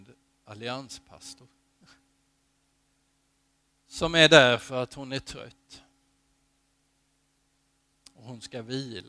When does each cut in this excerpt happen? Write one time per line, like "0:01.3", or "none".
none